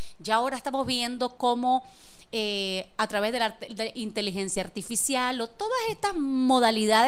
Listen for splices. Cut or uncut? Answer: uncut